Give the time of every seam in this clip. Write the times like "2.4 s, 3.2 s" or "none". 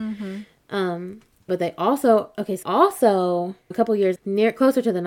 1.5 s, 2.6 s, 3.7 s, 4.2 s